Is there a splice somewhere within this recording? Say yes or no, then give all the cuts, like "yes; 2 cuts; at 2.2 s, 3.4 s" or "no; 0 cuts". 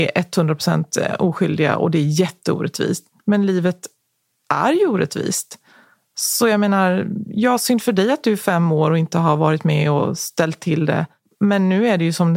no; 0 cuts